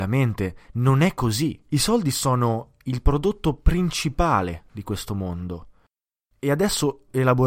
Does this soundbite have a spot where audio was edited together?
yes; 1 cut; at 1.7 s

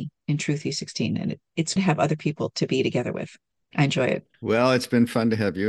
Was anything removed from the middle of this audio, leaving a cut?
yes; 3 cuts; at 1.8 s, 3.6 s, 4.3 s

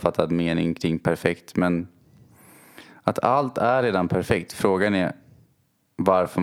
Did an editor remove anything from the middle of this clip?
no; 0 cuts

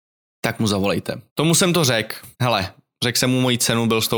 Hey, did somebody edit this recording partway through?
yes; 2 cuts; at 1.3 s, 2.3 s

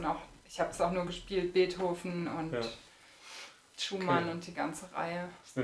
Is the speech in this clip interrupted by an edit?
no; 0 cuts

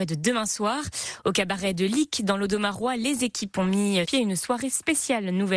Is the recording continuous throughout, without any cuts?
no; 1 cut; at 4.0 s

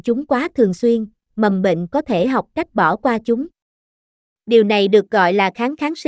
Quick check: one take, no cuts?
yes; 0 cuts

